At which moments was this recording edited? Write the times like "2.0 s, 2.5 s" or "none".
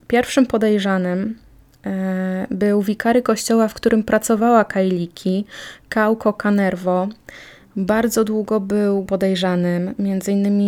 9.1 s